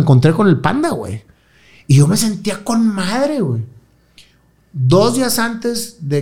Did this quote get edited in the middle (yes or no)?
no